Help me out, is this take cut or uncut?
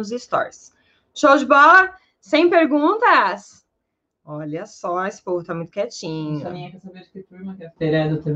uncut